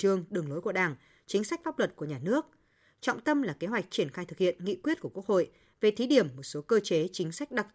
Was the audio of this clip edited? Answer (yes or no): no